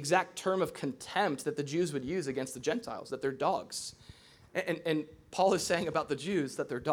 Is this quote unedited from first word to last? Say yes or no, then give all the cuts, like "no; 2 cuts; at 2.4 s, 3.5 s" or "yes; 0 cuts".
yes; 0 cuts